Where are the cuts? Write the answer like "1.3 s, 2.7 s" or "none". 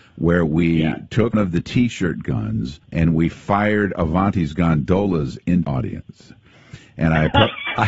1.3 s, 2.8 s, 5.6 s